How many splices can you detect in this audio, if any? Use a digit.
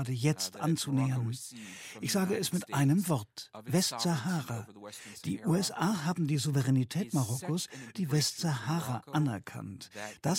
1